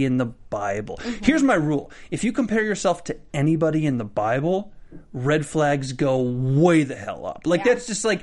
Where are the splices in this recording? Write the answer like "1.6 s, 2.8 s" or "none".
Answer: none